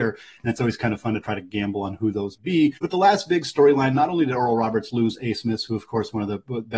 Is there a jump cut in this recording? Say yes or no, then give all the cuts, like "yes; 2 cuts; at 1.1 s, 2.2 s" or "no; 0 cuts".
yes; 2 cuts; at 2.4 s, 2.8 s